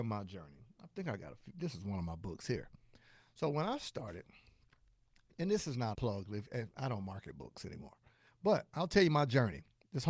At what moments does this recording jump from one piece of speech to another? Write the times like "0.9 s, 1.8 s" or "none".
5.9 s